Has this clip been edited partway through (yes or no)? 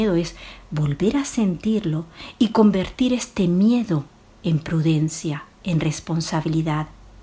yes